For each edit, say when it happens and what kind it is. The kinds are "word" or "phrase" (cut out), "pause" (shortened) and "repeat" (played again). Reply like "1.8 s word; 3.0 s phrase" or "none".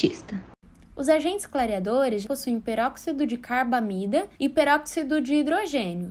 2.2 s word; 4.3 s pause